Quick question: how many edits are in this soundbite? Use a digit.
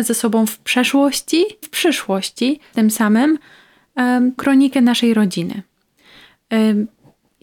3